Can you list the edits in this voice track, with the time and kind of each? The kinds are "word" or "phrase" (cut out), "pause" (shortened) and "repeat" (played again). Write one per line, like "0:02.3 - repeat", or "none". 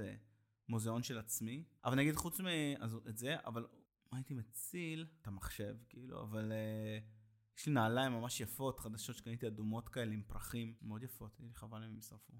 0:03.9 - pause